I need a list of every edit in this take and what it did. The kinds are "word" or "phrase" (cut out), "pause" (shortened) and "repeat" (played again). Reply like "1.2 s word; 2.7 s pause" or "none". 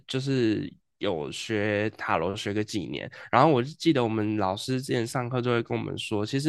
none